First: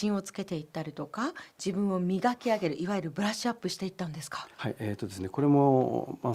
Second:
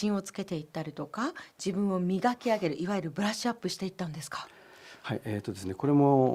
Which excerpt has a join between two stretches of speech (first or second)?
first